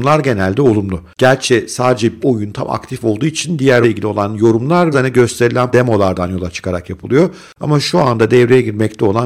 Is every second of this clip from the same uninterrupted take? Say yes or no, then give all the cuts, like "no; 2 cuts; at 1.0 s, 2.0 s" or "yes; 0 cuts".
no; 4 cuts; at 2.2 s, 3.8 s, 4.9 s, 5.7 s